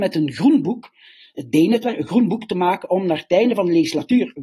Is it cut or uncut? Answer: uncut